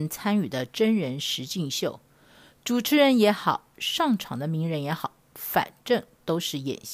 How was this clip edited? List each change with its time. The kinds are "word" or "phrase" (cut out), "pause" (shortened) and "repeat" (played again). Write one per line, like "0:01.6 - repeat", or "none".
none